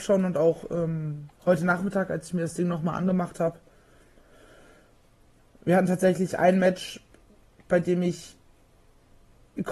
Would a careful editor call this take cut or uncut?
uncut